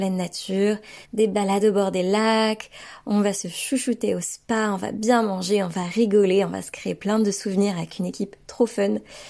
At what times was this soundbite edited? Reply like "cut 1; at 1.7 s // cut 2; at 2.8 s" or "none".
cut 1; at 1.0 s